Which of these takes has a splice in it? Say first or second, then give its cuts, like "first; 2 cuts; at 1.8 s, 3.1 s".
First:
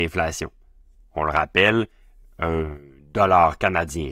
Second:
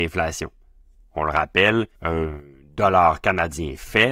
second; 1 cut; at 1.9 s